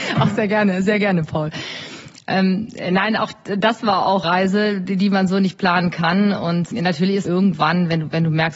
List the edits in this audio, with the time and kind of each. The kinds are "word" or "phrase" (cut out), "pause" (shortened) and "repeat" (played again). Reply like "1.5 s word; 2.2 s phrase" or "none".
4.2 s word; 6.7 s word; 7.2 s word